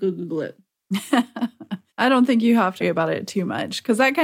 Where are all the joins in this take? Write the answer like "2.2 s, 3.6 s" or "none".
1.9 s, 2.8 s